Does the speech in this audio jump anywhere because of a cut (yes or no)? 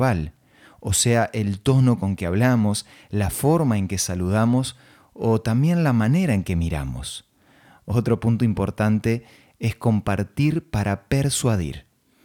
no